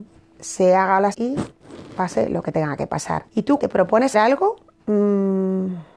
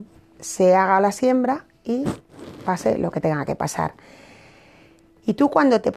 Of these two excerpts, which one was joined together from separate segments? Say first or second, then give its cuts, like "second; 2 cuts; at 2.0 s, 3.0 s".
first; 4 cuts; at 1.1 s, 3.3 s, 3.6 s, 4.1 s